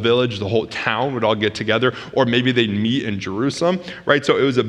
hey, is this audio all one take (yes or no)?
yes